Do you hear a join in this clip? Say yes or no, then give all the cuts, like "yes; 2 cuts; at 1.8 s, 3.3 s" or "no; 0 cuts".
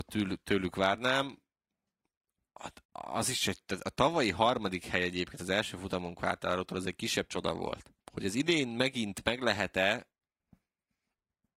yes; 2 cuts; at 2.8 s, 8.0 s